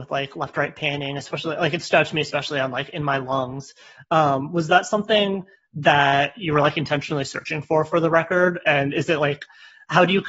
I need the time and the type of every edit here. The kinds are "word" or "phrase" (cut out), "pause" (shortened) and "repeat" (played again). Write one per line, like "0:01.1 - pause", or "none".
none